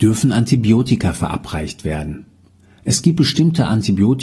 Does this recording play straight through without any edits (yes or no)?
yes